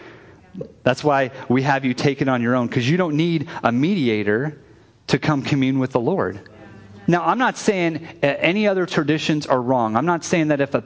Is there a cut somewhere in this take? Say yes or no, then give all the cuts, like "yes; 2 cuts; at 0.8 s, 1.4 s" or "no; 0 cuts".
no; 0 cuts